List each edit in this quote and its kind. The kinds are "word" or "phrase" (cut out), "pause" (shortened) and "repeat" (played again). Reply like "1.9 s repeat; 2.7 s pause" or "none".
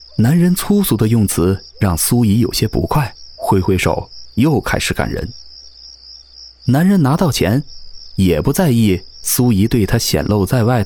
3.4 s pause